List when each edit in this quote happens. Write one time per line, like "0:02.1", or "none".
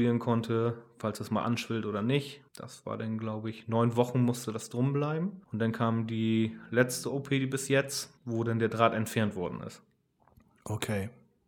0:02.5
0:05.4
0:08.2